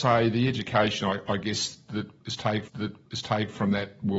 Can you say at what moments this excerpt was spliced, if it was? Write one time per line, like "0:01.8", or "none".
0:02.7

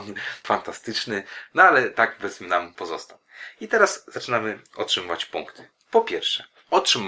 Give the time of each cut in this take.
none

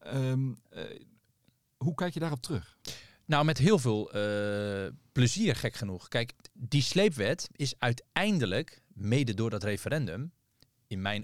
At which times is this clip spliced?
0:06.5

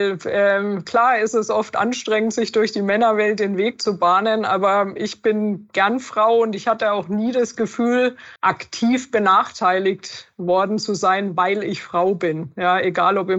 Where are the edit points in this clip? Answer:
0:08.4

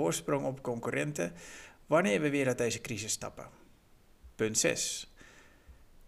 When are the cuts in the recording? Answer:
0:04.3

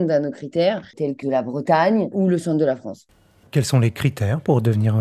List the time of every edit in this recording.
0:00.9
0:01.2
0:02.1

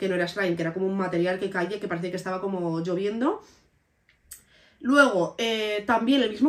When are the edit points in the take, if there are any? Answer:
none

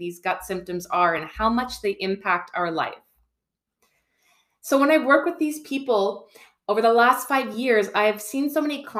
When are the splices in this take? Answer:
none

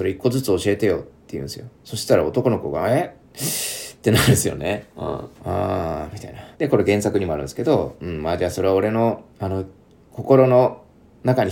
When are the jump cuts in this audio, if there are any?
0:01.1
0:01.7
0:04.9
0:05.3
0:06.5
0:09.3

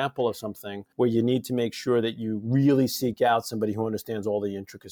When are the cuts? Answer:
0:00.9

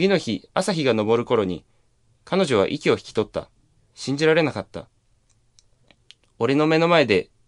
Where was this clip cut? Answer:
none

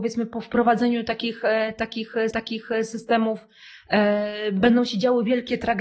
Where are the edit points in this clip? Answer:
0:02.3

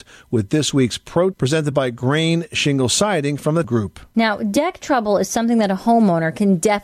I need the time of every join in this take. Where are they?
0:01.3
0:03.6

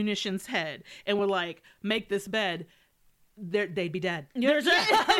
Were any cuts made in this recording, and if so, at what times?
none

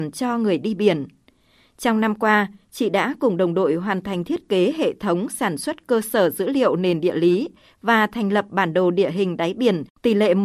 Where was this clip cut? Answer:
none

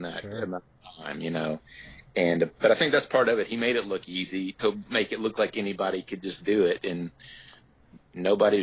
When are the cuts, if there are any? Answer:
none

